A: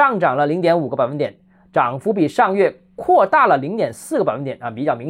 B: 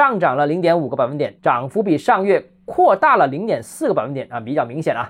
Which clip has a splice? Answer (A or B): B